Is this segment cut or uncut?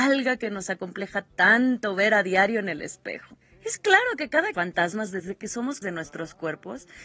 cut